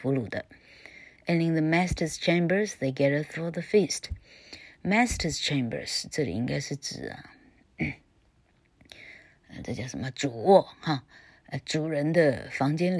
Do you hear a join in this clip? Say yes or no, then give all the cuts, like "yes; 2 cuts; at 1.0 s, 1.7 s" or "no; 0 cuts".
no; 0 cuts